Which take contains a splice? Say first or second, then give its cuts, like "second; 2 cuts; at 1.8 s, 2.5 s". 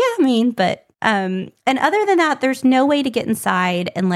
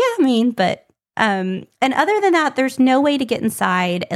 first; 1 cut; at 0.9 s